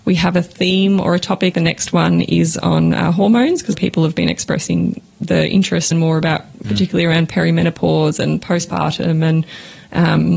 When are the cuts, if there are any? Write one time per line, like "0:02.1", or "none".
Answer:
0:01.5
0:03.7
0:05.9
0:06.6